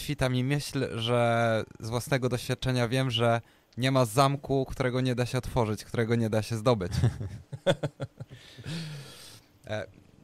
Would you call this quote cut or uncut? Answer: uncut